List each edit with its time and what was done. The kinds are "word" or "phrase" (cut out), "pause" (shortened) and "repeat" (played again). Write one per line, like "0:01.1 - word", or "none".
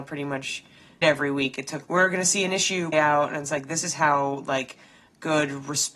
0:01.0 - word
0:01.8 - word
0:02.9 - word